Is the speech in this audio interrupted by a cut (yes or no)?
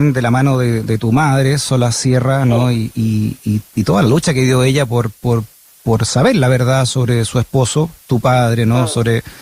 no